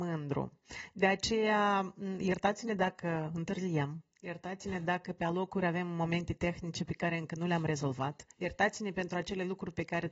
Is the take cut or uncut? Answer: cut